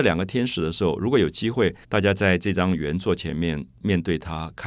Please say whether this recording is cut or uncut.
cut